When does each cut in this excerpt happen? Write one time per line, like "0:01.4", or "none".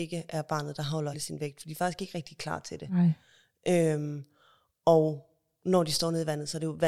0:01.1